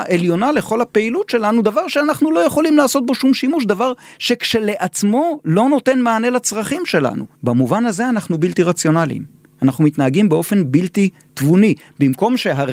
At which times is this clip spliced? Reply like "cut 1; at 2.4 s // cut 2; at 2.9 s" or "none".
cut 1; at 7.3 s